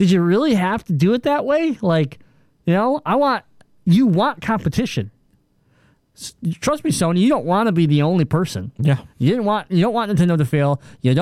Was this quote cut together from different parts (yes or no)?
no